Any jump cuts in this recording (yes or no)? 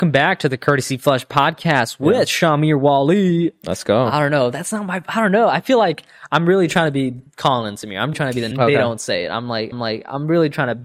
yes